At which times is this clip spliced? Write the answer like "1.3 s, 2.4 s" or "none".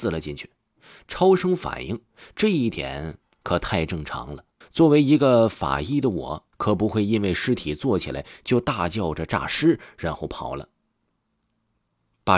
4.6 s, 6.5 s